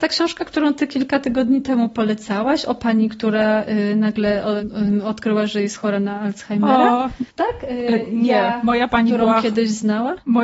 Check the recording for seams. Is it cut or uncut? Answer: cut